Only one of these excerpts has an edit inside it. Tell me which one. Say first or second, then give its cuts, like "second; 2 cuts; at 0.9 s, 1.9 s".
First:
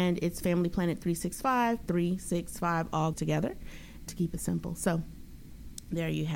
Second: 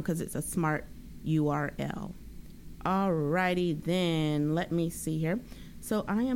first; 3 cuts; at 1.9 s, 3.1 s, 4.1 s